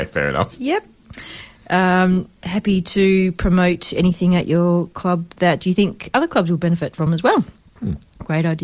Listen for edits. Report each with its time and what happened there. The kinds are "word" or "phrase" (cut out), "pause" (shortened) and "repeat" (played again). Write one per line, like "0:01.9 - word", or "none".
none